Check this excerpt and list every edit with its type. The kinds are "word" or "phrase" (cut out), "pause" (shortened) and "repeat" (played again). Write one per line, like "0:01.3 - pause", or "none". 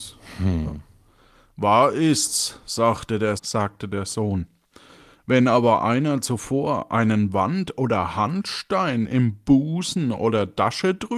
0:03.4 - word